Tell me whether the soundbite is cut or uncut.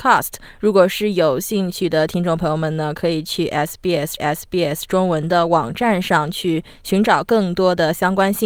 cut